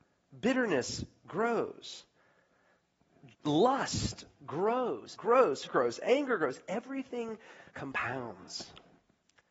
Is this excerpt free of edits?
no; 4 cuts; at 3.3 s, 5.2 s, 5.7 s, 7.7 s

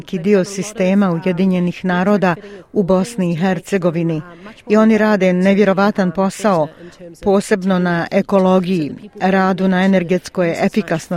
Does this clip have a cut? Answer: no; 0 cuts

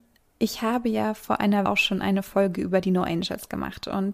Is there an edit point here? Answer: yes; 1 cut; at 1.7 s

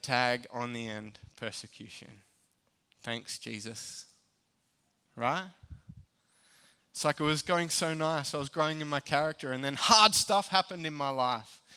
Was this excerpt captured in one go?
yes; 0 cuts

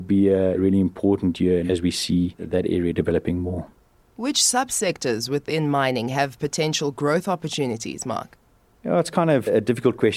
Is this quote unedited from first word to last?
yes; 0 cuts

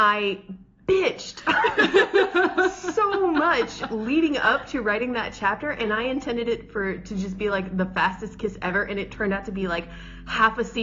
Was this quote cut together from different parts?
no; 0 cuts

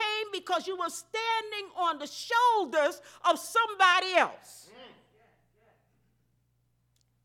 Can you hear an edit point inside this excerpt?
no; 0 cuts

